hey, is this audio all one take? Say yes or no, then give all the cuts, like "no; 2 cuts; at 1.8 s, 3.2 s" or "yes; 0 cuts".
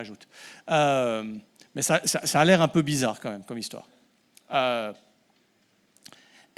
yes; 0 cuts